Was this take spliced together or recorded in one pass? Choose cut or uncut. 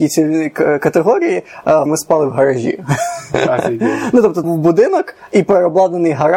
cut